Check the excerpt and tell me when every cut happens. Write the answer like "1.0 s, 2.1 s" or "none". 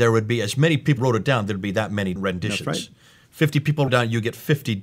1.0 s, 2.2 s, 3.9 s